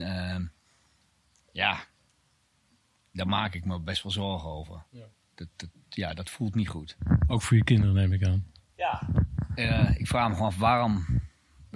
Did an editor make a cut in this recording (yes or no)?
no